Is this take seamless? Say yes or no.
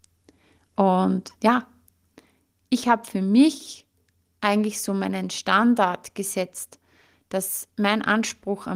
no